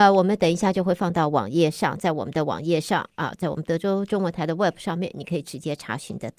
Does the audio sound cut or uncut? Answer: uncut